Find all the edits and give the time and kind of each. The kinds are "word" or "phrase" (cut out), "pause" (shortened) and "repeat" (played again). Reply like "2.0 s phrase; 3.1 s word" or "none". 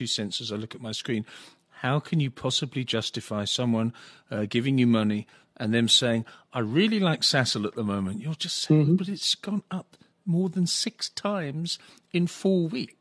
none